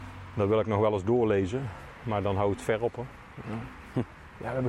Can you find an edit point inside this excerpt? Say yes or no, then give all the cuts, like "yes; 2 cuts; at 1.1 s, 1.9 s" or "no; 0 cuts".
no; 0 cuts